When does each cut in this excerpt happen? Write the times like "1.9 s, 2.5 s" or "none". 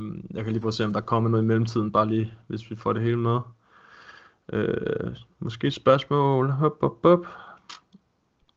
none